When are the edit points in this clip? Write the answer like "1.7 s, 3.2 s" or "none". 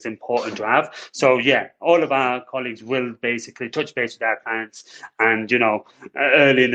none

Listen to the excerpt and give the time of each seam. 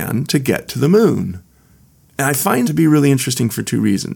2.6 s

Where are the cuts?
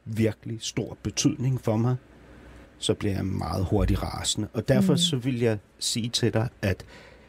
2.6 s

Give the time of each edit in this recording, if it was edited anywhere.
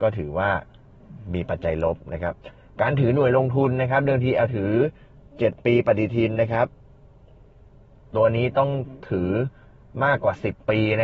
4.5 s

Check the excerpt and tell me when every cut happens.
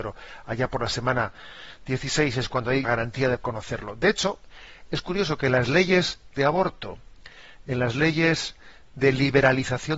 2.8 s, 3.4 s

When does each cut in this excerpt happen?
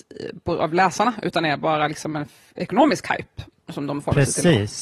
none

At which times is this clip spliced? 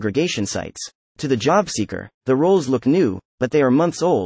1.0 s

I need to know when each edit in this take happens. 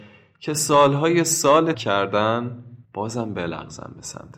1.7 s, 2.8 s

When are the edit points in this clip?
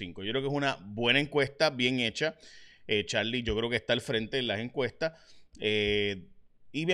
none

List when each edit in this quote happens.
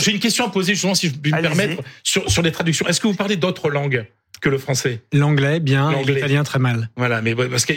none

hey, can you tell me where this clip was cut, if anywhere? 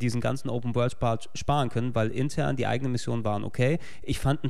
none

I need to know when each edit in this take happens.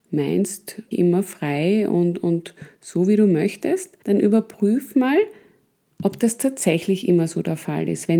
0.9 s, 4.0 s

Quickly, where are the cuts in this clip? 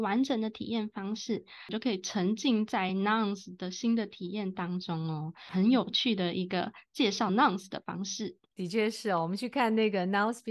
none

